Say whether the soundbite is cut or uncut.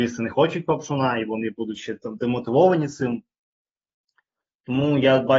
uncut